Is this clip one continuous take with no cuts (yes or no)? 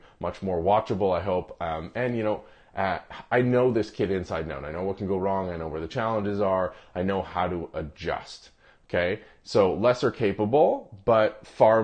yes